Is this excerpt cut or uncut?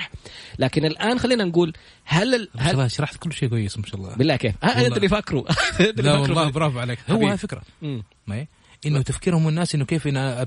uncut